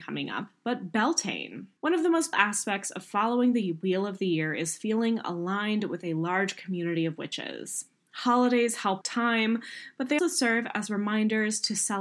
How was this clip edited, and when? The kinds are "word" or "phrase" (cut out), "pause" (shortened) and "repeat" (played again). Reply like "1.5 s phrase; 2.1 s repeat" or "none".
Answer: 1.8 s pause; 2.3 s word; 9.0 s phrase; 10.2 s word